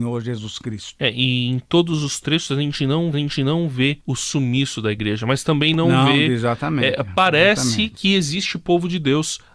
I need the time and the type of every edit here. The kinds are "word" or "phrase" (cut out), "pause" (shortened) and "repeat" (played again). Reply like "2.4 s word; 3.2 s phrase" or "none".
3.1 s repeat